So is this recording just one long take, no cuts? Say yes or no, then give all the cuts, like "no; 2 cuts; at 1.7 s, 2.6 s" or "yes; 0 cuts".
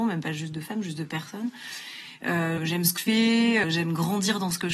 no; 3 cuts; at 2.6 s, 3.0 s, 3.6 s